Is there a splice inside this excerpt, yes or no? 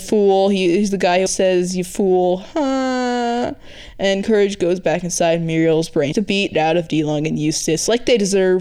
yes